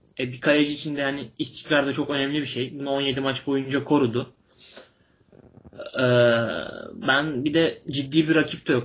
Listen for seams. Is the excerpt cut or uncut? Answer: uncut